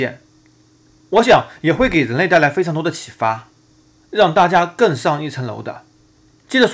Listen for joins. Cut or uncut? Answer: uncut